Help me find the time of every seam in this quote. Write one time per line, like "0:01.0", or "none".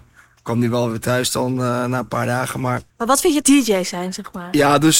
0:02.9
0:03.4